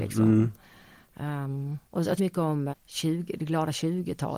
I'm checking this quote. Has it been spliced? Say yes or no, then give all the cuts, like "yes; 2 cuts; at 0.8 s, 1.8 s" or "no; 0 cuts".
yes; 3 cuts; at 1.9 s, 2.2 s, 2.7 s